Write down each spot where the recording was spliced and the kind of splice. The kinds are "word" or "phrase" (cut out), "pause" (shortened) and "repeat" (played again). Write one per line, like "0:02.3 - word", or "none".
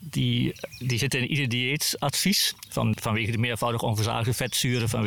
0:02.9 - word